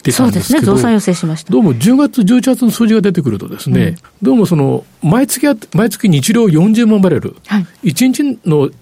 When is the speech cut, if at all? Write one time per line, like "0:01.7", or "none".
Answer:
0:04.0